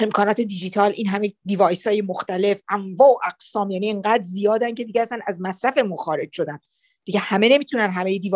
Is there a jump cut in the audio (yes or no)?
no